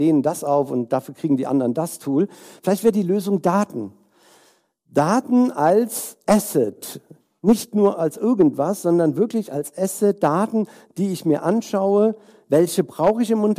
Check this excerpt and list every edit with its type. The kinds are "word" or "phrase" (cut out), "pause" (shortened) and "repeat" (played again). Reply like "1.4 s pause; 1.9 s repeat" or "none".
none